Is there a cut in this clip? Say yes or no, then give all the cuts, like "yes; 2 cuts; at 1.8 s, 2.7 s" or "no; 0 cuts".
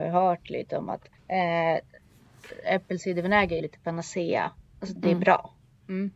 yes; 3 cuts; at 1.2 s, 3.6 s, 5.0 s